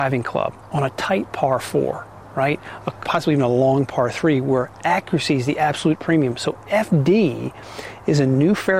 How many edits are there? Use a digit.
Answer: 1